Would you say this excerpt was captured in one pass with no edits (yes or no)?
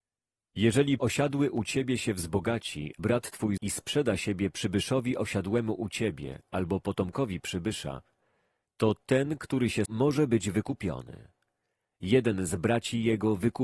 no